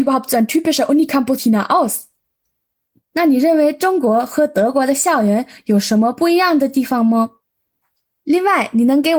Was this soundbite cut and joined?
yes; 1 cut; at 1.4 s

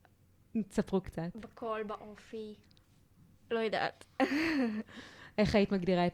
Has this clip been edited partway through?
no; 0 cuts

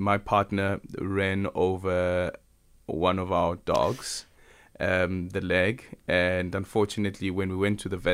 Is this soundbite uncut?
yes; 0 cuts

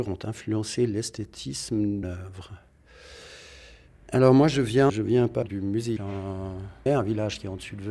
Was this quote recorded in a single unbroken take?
no; 6 cuts; at 2.0 s, 3.9 s, 4.9 s, 5.4 s, 6.0 s, 6.9 s

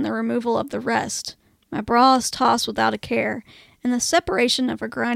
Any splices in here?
no; 0 cuts

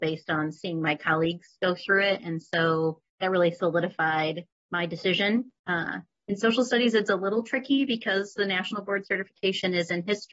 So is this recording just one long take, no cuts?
no; 3 cuts; at 3.1 s, 4.5 s, 5.6 s

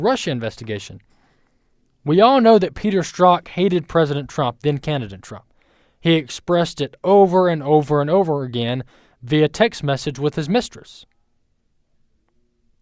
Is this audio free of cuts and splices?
yes; 0 cuts

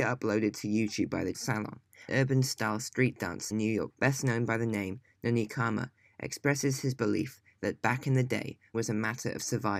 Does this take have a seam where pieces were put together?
yes; 5 cuts; at 1.3 s, 2.1 s, 3.5 s, 3.9 s, 8.7 s

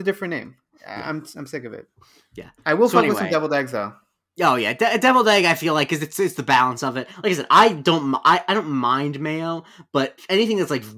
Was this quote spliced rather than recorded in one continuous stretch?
no; 0 cuts

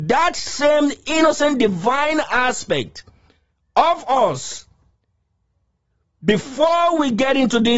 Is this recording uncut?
yes; 0 cuts

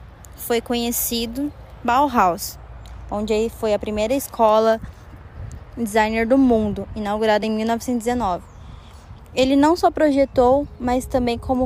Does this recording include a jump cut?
no; 0 cuts

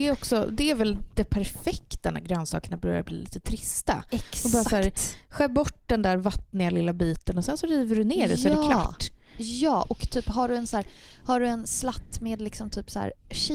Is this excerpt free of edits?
yes; 0 cuts

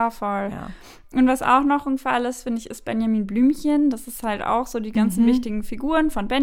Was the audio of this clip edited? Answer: no; 0 cuts

